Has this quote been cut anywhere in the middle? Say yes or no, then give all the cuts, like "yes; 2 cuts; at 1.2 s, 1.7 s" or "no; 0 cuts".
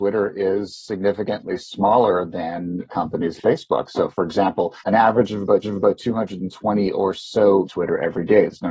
yes; 5 cuts; at 2.9 s, 3.4 s, 4.8 s, 5.6 s, 7.6 s